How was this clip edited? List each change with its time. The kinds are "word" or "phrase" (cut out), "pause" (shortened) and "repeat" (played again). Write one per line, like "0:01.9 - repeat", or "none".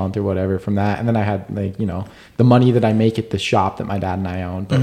none